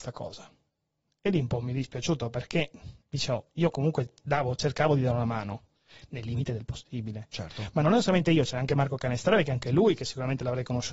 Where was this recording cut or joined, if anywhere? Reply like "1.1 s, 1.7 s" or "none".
none